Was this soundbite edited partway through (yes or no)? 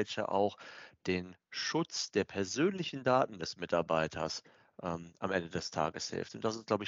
no